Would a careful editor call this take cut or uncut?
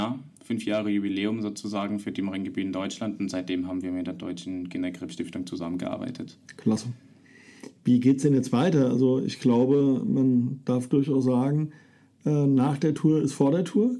uncut